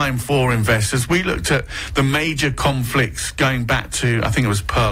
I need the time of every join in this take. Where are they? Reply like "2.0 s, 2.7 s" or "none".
none

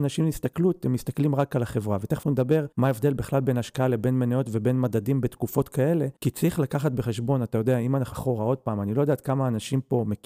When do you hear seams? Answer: 2.2 s, 2.7 s, 6.2 s, 8.1 s

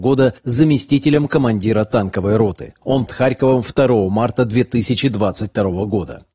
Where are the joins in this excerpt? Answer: 3.1 s

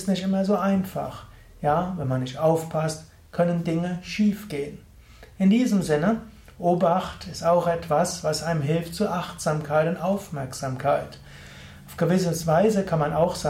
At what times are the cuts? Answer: none

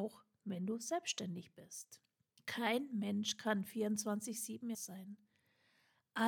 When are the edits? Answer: 2.3 s, 4.7 s

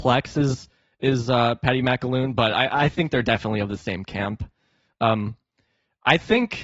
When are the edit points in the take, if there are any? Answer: none

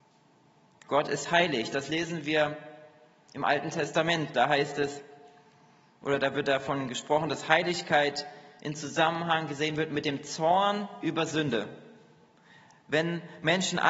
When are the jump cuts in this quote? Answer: none

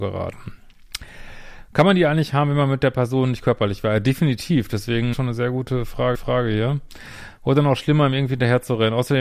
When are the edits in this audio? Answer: 5.1 s, 6.1 s

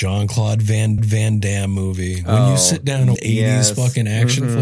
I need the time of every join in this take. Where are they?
1.0 s, 3.1 s

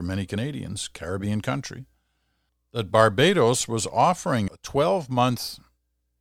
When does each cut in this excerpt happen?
2.5 s, 4.5 s

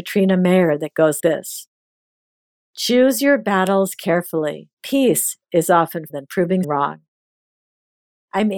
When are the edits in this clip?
1.2 s, 4.7 s, 6.1 s, 6.6 s

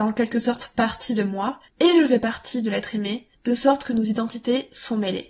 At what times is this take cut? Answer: 1.7 s, 3.3 s

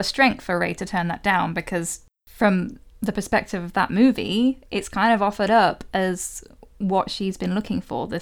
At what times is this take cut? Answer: 2.1 s

